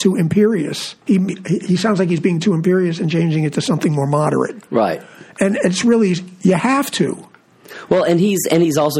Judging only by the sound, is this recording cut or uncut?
cut